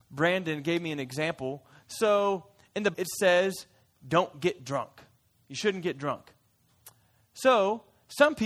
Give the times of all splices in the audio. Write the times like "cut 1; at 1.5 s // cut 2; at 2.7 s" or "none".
cut 1; at 2.9 s